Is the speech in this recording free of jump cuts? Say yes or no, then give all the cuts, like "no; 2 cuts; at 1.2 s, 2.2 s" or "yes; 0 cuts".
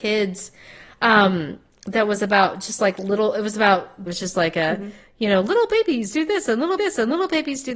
no; 2 cuts; at 4.1 s, 6.8 s